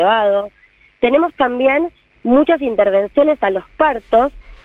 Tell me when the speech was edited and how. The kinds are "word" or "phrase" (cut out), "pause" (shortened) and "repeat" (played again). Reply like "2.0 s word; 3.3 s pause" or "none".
none